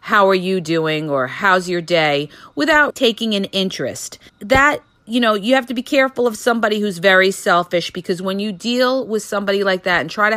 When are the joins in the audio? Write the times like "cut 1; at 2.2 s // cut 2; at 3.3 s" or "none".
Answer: cut 1; at 2.9 s // cut 2; at 4.3 s